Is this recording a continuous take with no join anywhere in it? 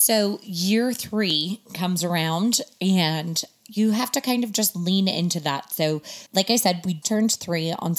no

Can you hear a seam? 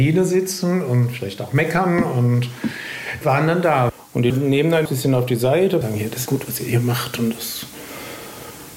yes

